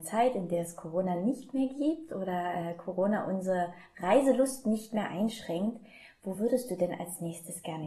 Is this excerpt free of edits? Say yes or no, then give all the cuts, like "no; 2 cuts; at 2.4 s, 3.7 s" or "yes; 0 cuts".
yes; 0 cuts